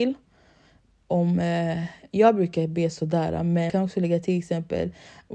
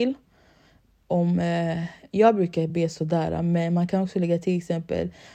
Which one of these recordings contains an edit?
first; 1 cut; at 3.7 s

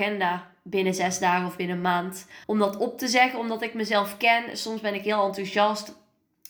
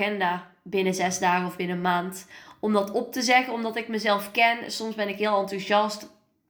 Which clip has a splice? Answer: first; 1 cut; at 2.4 s

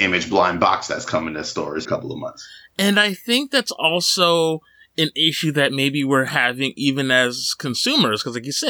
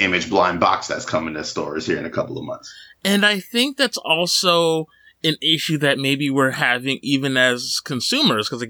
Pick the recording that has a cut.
first; 1 cut; at 1.8 s

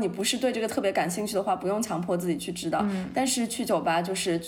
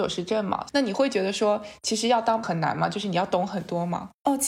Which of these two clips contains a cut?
second; 1 cut; at 2.4 s

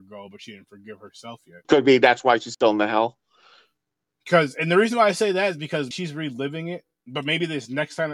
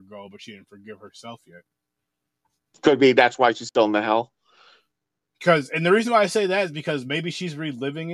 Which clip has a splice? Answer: first; 2 cuts; at 1.6 s, 5.9 s

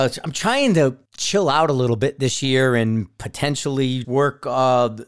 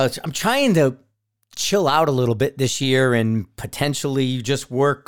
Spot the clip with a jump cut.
first; 2 cuts; at 1.1 s, 4.0 s

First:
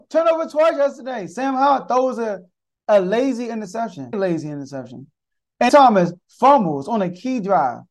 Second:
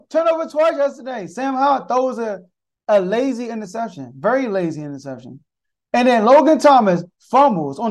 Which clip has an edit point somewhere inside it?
first; 2 cuts; at 4.1 s, 5.7 s

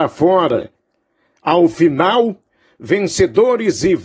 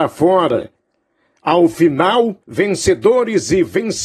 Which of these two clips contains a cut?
second; 1 cut; at 2.4 s

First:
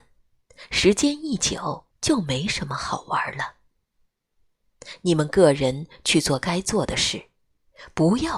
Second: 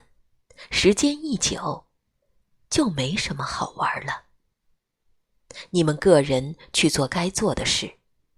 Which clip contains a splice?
first; 1 cut; at 1.9 s

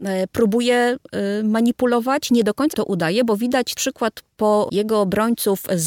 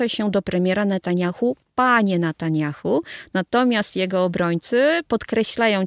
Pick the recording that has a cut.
first; 3 cuts; at 2.7 s, 3.7 s, 4.7 s

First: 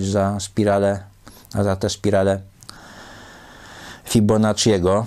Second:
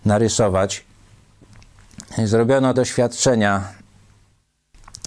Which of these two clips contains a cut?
second; 1 cut; at 2.7 s

